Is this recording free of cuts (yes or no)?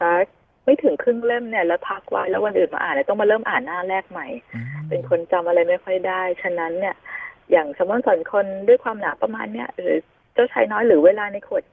yes